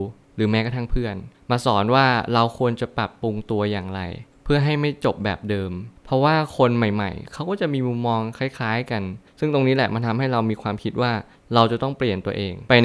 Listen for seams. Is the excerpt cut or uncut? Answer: uncut